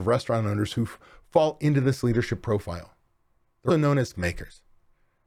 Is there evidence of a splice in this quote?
yes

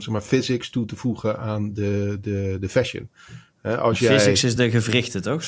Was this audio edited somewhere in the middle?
no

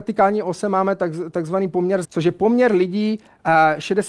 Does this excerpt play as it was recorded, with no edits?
no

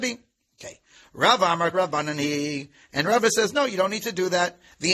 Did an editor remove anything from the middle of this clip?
yes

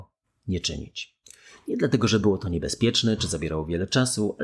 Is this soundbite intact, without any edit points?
yes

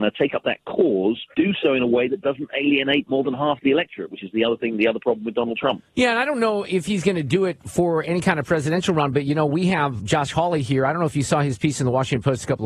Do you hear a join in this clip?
yes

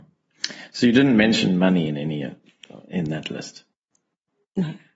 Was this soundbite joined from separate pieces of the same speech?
no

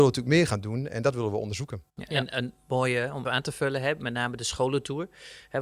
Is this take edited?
yes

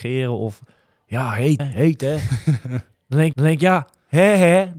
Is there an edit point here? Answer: yes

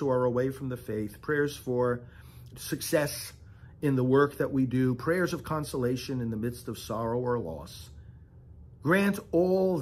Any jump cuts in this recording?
yes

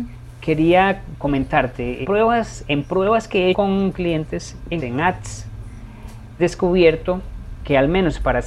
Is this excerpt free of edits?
no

